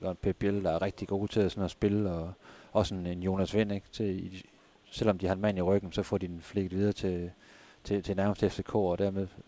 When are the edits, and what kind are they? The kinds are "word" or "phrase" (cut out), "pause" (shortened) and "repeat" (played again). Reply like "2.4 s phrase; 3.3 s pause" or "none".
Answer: none